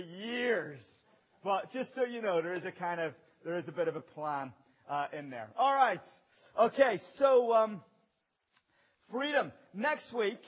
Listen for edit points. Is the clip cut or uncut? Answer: uncut